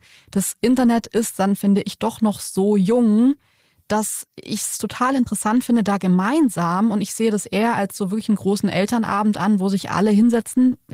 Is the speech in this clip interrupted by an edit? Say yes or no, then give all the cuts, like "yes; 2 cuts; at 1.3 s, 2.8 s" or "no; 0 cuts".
no; 0 cuts